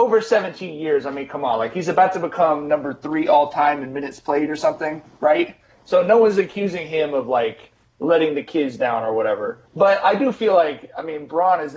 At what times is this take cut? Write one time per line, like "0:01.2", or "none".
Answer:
0:09.7